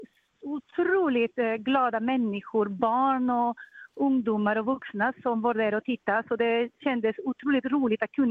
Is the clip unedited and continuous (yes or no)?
yes